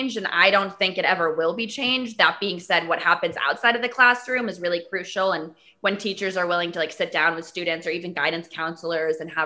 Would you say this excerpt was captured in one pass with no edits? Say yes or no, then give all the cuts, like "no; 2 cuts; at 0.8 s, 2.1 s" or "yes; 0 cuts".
yes; 0 cuts